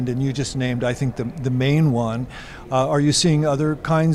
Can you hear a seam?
no; 0 cuts

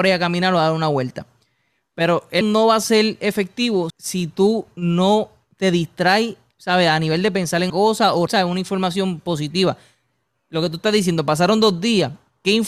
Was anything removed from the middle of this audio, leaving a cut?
yes; 4 cuts; at 2.4 s, 3.9 s, 7.7 s, 8.3 s

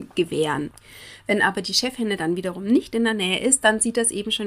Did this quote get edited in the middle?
no; 0 cuts

